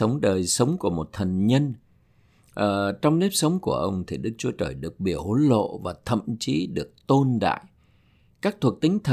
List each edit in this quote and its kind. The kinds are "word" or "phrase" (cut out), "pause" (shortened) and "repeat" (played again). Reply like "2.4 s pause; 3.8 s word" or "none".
none